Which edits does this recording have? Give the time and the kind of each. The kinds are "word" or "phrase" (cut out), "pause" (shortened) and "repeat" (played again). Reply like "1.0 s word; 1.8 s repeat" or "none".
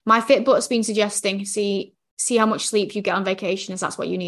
none

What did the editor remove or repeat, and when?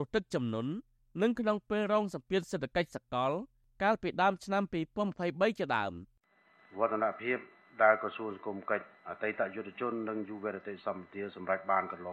none

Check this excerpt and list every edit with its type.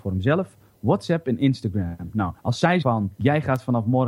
2.4 s pause; 2.8 s word

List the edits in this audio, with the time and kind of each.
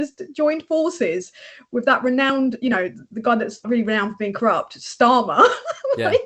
3.6 s word

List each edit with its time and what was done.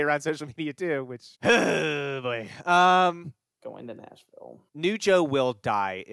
1.3 s pause; 3.6 s word; 4.7 s pause

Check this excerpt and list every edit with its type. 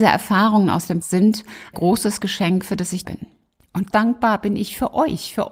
1.0 s word; 1.7 s phrase; 3.0 s word; 3.9 s phrase

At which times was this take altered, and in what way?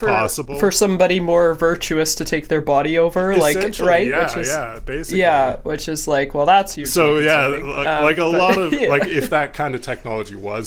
none

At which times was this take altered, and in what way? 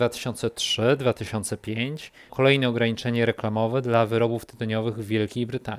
2.3 s word

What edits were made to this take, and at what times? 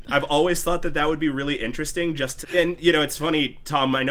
2.4 s phrase

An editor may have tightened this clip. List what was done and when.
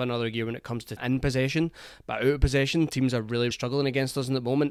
1.0 s word; 3.5 s word

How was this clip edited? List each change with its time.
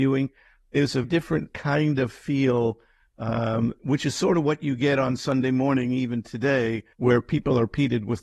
1.0 s word; 3.8 s pause; 6.9 s pause

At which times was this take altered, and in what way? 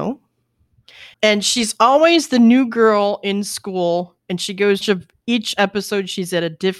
1.1 s pause; 4.8 s phrase

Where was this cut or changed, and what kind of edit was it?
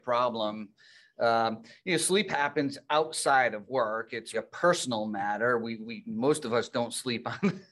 4.3 s word

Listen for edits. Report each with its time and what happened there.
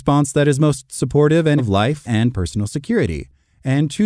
1.6 s word; 2.0 s word

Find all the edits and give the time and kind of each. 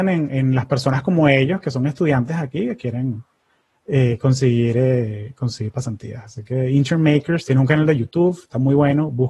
none

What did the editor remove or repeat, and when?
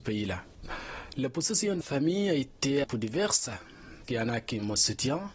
1.8 s word; 2.8 s word; 4.0 s word

